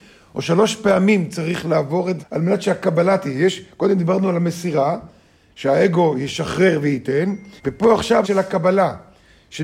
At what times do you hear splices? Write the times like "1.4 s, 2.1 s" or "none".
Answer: 2.2 s, 7.6 s, 8.2 s

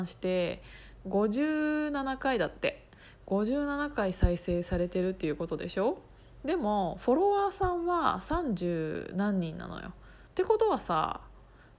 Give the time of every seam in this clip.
10.3 s

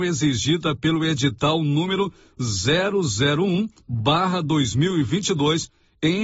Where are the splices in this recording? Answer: none

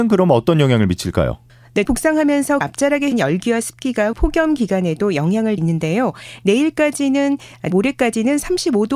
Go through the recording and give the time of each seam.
1.8 s, 2.6 s, 3.1 s, 4.1 s, 5.6 s, 7.7 s

